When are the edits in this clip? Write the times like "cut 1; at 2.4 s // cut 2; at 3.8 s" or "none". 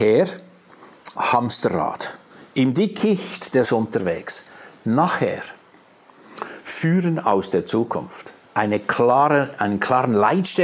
cut 1; at 1.2 s // cut 2; at 2.3 s // cut 3; at 3.6 s // cut 4; at 8.4 s